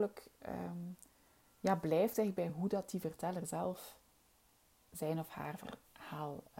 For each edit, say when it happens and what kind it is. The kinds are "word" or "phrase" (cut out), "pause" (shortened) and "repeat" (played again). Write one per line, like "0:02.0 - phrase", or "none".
none